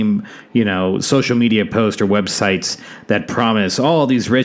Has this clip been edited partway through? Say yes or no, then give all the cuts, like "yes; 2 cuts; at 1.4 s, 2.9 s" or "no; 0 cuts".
no; 0 cuts